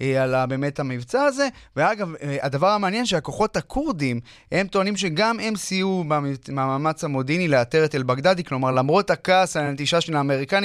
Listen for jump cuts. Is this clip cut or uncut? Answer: uncut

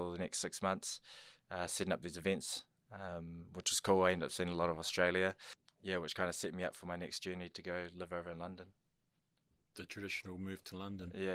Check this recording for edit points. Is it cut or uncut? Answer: uncut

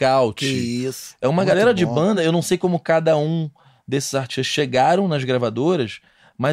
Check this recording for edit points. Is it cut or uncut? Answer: uncut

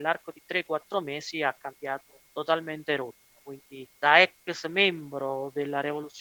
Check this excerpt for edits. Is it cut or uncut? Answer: cut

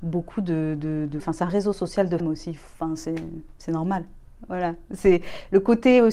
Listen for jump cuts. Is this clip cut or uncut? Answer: cut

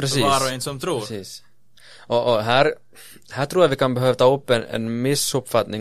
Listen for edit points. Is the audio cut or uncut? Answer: uncut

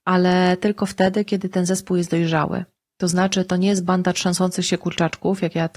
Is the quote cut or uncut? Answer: uncut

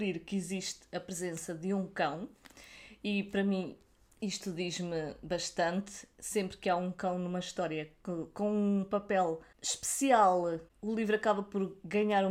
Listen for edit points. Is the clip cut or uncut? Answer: uncut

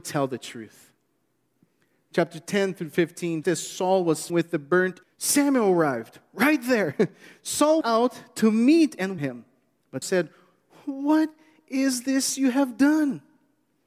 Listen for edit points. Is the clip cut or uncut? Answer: cut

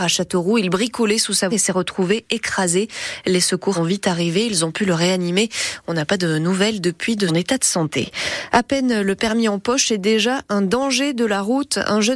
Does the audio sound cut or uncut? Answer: cut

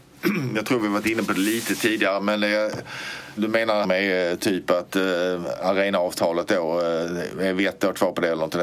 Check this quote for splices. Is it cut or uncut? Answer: cut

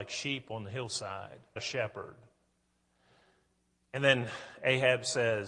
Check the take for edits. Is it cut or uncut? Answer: cut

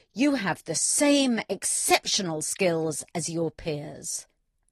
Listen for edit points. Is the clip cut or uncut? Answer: uncut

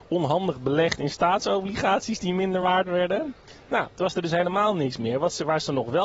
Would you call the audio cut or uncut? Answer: uncut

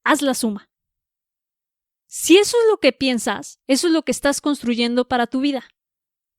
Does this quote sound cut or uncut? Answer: uncut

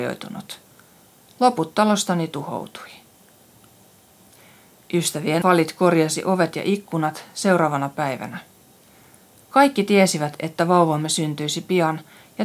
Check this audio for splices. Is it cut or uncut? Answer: cut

